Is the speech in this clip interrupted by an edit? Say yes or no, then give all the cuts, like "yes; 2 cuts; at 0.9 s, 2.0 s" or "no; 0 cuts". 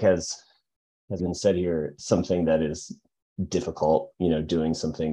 yes; 2 cuts; at 1.2 s, 4.1 s